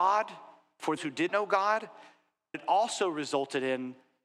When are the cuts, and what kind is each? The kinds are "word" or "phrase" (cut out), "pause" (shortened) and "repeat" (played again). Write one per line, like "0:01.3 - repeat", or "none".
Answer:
0:01.0 - word
0:01.3 - word
0:02.5 - word